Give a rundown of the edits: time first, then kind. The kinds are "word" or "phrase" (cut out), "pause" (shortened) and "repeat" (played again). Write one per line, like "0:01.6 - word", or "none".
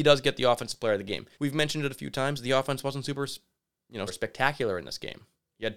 0:01.3 - pause
0:04.1 - word